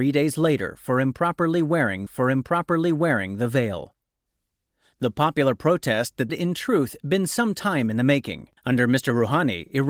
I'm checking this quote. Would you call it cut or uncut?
cut